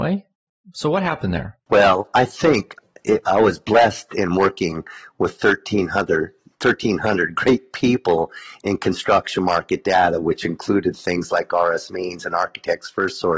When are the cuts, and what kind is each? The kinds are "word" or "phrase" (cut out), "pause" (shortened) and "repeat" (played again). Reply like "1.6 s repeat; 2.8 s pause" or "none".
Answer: none

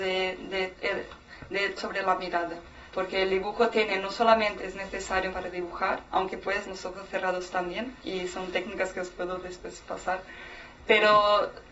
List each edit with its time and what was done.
1.8 s word; 2.9 s pause; 4.6 s phrase; 5.3 s word; 6.1 s pause; 6.6 s word; 8.0 s pause; 10.7 s word

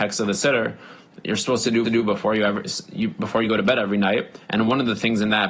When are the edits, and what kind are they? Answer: 1.8 s repeat

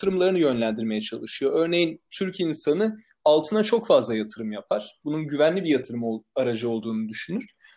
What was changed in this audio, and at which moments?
none

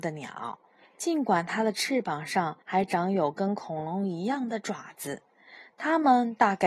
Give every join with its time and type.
2.6 s pause

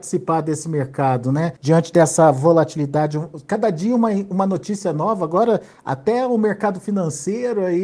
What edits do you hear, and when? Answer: 1.6 s pause

